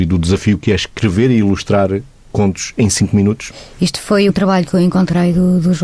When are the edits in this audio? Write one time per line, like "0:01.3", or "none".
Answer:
0:04.3